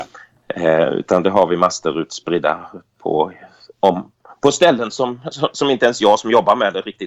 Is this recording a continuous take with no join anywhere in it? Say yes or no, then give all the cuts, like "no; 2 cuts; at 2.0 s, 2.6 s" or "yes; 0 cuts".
yes; 0 cuts